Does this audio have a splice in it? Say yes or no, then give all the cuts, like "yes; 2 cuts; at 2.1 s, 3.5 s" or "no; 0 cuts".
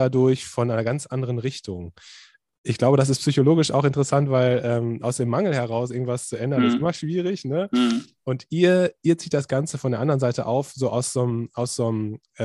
no; 0 cuts